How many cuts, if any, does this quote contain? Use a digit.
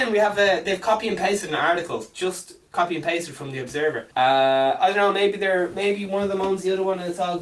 1